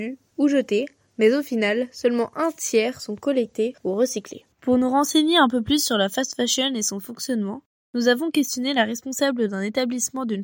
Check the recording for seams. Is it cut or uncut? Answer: cut